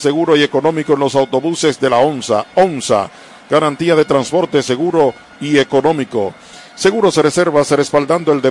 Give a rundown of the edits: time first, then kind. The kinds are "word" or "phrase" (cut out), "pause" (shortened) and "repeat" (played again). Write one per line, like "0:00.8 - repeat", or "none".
none